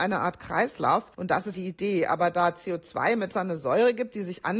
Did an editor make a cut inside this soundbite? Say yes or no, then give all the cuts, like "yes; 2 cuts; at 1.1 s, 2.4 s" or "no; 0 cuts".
yes; 3 cuts; at 1.1 s, 1.5 s, 3.3 s